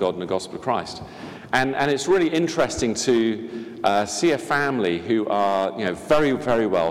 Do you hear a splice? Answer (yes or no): no